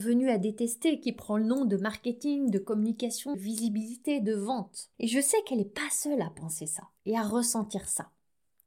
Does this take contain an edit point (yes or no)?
yes